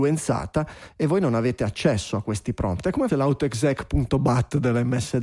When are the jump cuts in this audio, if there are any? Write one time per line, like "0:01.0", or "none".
0:03.1